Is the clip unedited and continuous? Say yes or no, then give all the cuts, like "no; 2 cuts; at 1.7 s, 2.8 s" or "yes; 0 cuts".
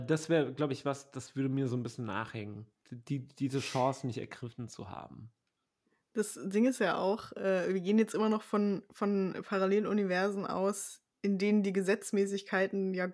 yes; 0 cuts